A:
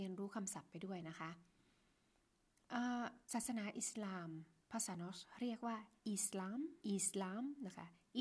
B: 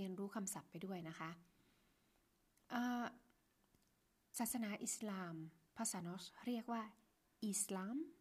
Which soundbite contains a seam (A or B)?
A